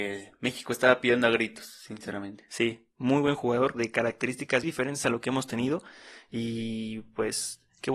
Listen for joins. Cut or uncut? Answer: cut